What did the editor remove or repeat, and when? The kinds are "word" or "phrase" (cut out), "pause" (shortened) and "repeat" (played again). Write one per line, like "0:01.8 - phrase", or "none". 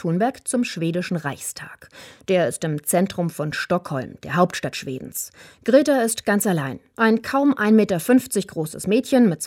none